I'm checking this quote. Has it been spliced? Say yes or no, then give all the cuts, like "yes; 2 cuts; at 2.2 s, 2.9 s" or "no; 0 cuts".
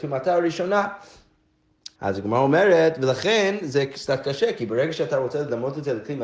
yes; 1 cut; at 2.0 s